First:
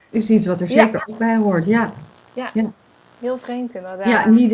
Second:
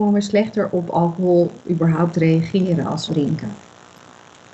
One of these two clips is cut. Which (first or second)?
second